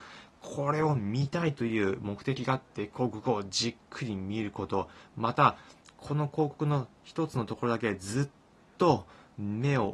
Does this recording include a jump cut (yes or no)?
no